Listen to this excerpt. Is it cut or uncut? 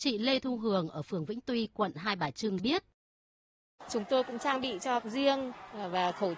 cut